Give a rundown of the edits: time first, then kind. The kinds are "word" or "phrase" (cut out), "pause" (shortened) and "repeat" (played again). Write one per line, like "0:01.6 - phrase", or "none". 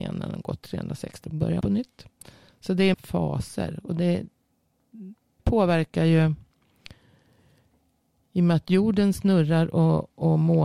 0:01.2 - word
0:01.6 - word
0:02.9 - phrase
0:05.4 - word